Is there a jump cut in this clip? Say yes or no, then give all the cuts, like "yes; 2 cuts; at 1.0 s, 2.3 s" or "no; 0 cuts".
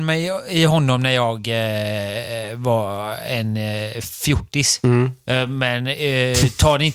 no; 0 cuts